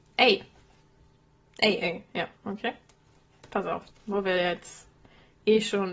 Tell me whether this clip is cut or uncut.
cut